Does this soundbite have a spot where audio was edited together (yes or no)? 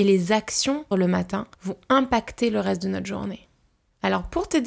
yes